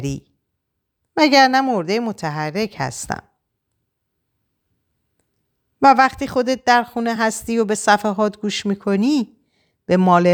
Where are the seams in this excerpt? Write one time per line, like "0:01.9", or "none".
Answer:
none